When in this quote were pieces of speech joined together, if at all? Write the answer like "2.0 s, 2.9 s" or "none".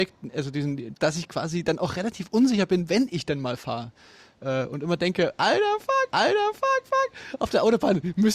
1.0 s, 6.1 s